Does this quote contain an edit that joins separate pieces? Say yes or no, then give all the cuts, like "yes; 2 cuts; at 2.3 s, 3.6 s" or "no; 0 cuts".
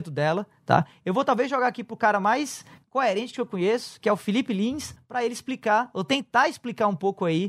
no; 0 cuts